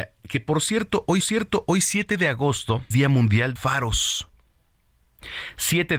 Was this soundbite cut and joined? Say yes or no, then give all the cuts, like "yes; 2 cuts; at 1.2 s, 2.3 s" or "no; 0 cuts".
yes; 3 cuts; at 1.2 s, 2.9 s, 3.6 s